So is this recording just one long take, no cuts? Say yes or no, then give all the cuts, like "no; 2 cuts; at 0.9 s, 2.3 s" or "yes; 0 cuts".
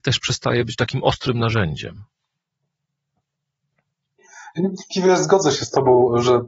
yes; 0 cuts